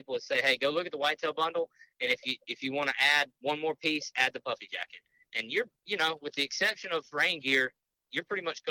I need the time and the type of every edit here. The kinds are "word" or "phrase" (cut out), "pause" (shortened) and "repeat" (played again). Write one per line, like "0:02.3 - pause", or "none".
0:07.1 - word